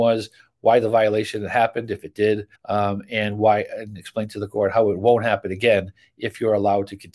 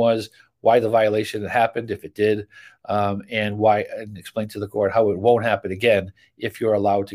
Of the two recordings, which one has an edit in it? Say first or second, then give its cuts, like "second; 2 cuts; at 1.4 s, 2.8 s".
first; 1 cut; at 2.5 s